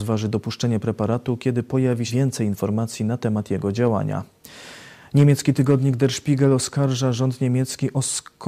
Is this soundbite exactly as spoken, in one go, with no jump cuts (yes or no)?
no